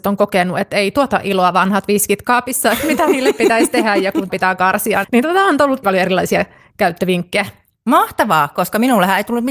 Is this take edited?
yes; 3 cuts; at 4.3 s, 5.0 s, 5.8 s

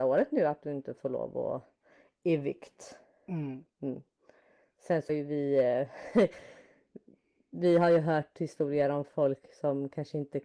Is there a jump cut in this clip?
yes; 1 cut; at 5.1 s

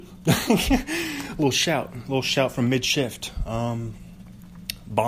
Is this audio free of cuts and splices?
yes; 0 cuts

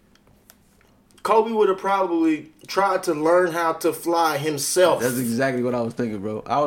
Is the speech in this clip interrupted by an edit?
no; 0 cuts

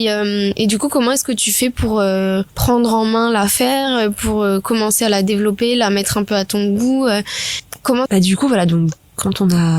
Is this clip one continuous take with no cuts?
no; 2 cuts; at 2.5 s, 8.1 s

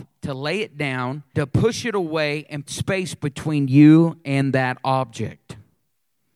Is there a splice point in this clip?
yes; 2 cuts; at 1.3 s, 2.7 s

